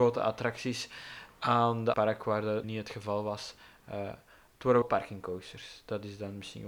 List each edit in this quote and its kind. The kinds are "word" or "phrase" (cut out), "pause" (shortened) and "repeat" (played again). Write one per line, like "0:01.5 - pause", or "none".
0:01.9 - phrase
0:02.6 - word
0:04.8 - word